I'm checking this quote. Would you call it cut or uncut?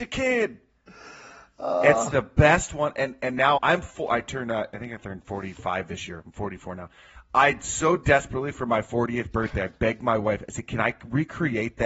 cut